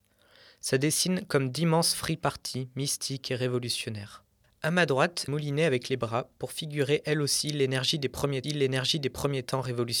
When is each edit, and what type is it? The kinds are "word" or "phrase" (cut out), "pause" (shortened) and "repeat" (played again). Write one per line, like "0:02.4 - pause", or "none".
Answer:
0:04.4 - pause
0:05.3 - phrase
0:08.4 - repeat